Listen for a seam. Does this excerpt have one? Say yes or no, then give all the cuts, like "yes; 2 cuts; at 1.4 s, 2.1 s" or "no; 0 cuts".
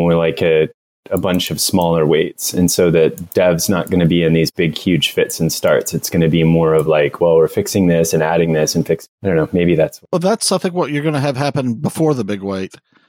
no; 0 cuts